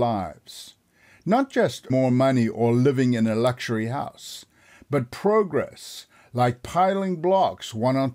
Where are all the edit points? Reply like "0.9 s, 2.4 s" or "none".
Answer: 1.9 s